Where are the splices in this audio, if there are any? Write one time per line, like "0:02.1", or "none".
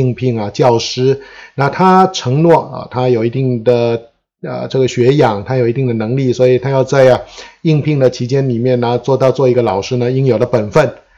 none